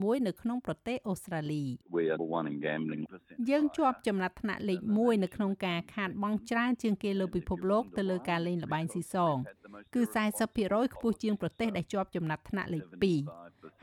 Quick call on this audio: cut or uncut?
cut